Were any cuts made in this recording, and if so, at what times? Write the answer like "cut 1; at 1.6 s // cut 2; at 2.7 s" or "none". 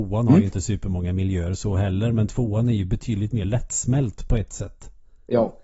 none

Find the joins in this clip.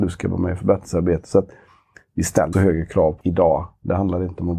cut 1; at 2.5 s // cut 2; at 3.2 s

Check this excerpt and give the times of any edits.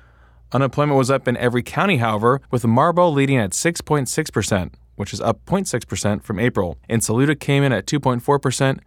cut 1; at 2.4 s // cut 2; at 6.8 s

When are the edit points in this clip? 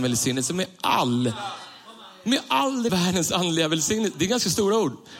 cut 1; at 2.9 s

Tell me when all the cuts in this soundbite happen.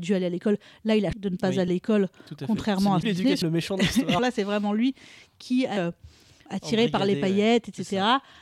cut 1; at 1.1 s // cut 2; at 1.7 s // cut 3; at 3.0 s // cut 4; at 3.4 s // cut 5; at 4.2 s // cut 6; at 5.8 s // cut 7; at 6.5 s

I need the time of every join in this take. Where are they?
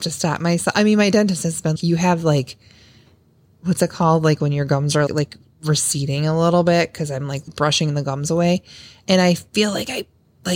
cut 1; at 1.8 s // cut 2; at 5.1 s // cut 3; at 7.5 s

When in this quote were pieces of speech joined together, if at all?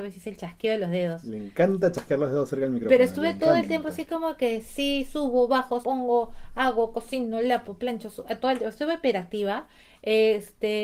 cut 1; at 3.4 s // cut 2; at 5.8 s // cut 3; at 8.4 s

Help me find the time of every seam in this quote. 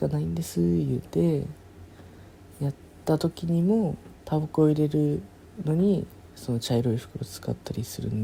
cut 1; at 4.2 s

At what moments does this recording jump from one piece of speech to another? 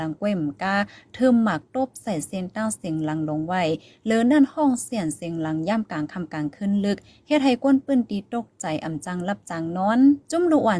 none

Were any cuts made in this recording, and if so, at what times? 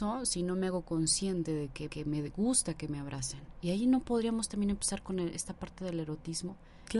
cut 1; at 1.9 s

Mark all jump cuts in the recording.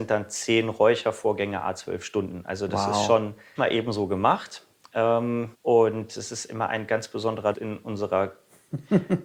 cut 1; at 3.6 s // cut 2; at 5.5 s // cut 3; at 7.5 s

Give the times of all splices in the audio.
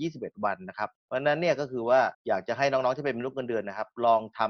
cut 1; at 0.9 s // cut 2; at 2.1 s

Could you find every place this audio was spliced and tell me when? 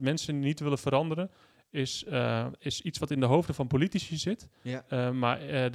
none

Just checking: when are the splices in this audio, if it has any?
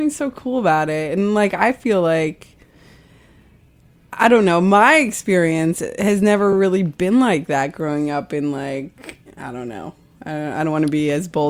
none

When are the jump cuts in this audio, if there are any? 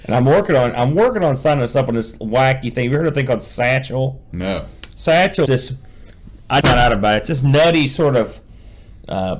cut 1; at 5.5 s // cut 2; at 6.6 s

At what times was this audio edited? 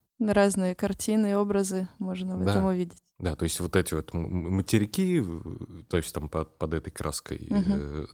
cut 1; at 3.1 s

